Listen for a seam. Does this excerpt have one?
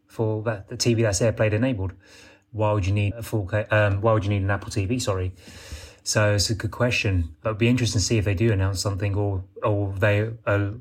yes; 1 cut; at 3.1 s

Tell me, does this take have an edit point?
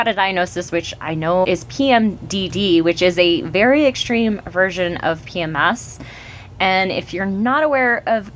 yes; 1 cut; at 1.4 s

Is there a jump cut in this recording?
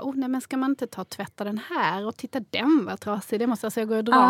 no; 0 cuts

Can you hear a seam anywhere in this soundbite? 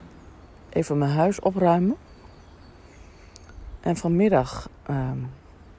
no; 0 cuts

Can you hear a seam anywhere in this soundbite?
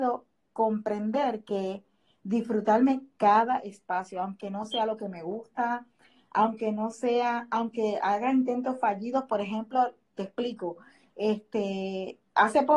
no; 0 cuts

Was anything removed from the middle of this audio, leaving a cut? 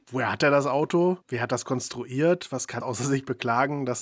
yes; 2 cuts; at 1.2 s, 2.8 s

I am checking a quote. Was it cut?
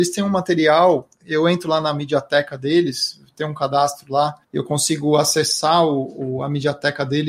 yes; 1 cut; at 4.4 s

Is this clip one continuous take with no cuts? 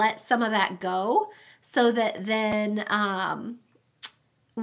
yes; 0 cuts

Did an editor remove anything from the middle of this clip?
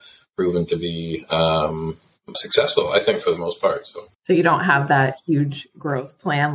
yes; 2 cuts; at 2.3 s, 4.1 s

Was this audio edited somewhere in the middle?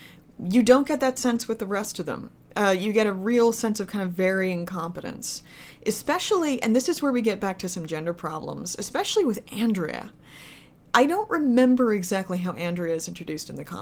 no; 0 cuts

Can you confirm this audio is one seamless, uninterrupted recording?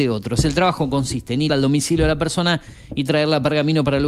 no; 1 cut; at 1.5 s

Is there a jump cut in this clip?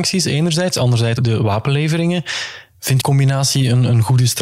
yes; 2 cuts; at 1.2 s, 3.0 s

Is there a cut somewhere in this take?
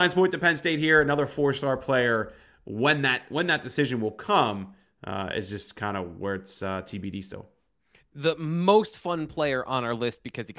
no; 0 cuts

